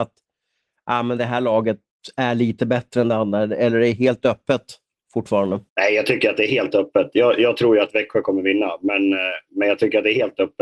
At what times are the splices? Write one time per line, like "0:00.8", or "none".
0:05.7